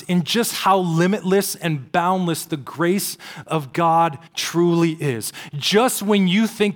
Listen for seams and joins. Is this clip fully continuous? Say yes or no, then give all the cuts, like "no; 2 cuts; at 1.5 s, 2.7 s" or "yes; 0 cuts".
no; 1 cut; at 4.3 s